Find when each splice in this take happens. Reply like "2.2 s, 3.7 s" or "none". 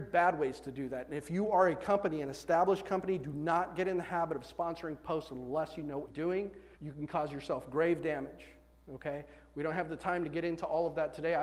6.1 s, 6.7 s